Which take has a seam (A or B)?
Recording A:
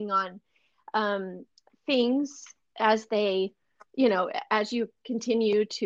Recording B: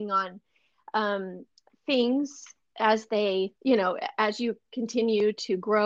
B